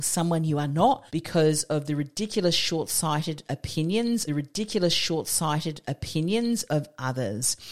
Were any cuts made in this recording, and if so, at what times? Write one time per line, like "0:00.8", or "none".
0:01.1
0:04.3